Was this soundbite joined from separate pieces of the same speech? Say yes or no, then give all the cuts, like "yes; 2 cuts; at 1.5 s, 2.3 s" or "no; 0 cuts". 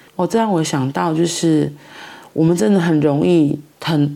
no; 0 cuts